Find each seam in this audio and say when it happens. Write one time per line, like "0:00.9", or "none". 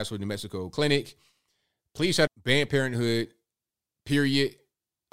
0:02.3
0:02.7